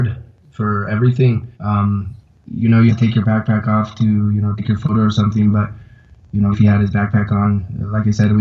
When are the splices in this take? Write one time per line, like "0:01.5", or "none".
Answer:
0:01.5
0:02.9
0:04.6
0:06.5